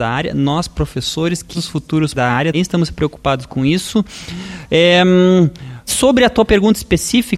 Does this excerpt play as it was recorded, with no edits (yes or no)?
no